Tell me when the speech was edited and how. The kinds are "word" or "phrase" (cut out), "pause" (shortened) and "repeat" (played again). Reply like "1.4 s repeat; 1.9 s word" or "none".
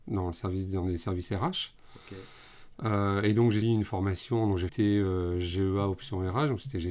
3.6 s word; 4.7 s phrase